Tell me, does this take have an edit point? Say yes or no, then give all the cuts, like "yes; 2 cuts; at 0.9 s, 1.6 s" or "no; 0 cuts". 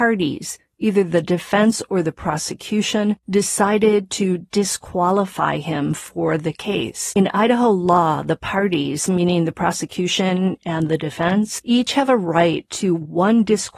no; 0 cuts